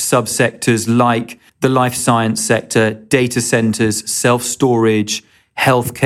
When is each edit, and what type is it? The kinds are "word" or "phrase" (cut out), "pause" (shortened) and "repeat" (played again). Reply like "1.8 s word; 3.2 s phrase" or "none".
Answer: 1.5 s pause